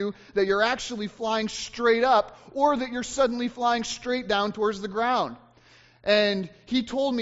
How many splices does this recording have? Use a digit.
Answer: 0